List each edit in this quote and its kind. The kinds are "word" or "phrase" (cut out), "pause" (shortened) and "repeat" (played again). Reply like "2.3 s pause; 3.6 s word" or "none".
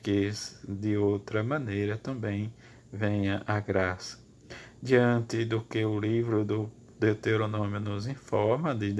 none